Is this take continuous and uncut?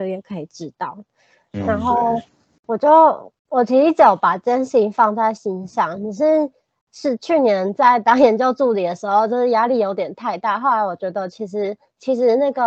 no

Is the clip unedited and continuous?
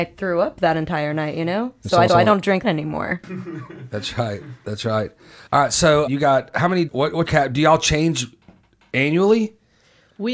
no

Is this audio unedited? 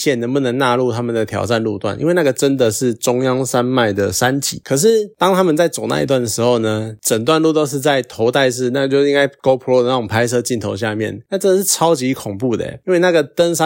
yes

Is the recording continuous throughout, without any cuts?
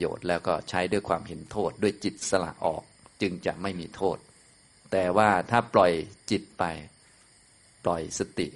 yes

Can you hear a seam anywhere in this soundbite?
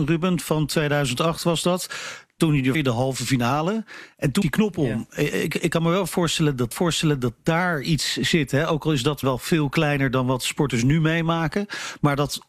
yes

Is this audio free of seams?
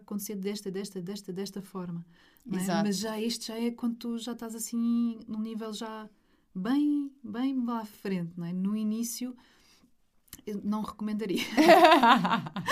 yes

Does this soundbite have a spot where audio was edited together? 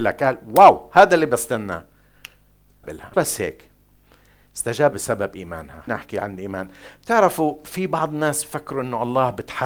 yes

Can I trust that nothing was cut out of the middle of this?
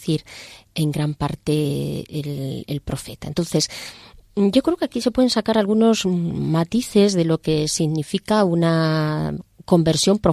yes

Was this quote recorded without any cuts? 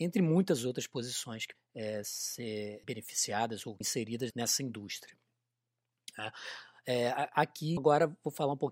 no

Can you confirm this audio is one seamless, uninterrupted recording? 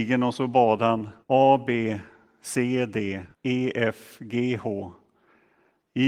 no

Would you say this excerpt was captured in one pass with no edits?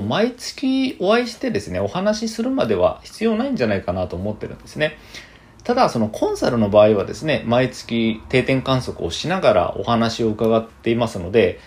yes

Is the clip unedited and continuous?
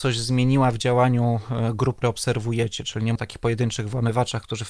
no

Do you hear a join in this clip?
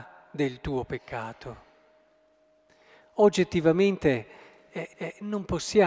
yes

